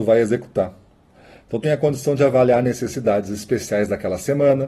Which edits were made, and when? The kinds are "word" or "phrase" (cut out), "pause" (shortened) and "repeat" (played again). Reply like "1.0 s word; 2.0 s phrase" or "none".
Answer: 1.6 s word